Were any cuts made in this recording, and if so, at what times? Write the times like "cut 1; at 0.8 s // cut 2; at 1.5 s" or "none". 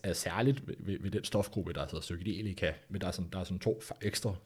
cut 1; at 2.9 s